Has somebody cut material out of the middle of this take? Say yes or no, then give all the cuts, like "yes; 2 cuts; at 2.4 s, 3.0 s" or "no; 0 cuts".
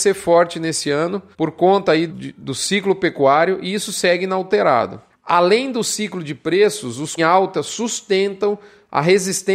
yes; 4 cuts; at 1.3 s, 2.1 s, 5.1 s, 7.2 s